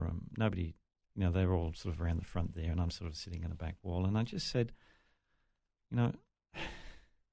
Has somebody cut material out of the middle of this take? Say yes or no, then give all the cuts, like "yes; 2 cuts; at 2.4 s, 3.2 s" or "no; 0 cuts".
no; 0 cuts